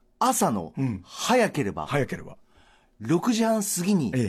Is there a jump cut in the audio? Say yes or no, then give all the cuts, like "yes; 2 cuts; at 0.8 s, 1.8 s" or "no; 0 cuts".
no; 0 cuts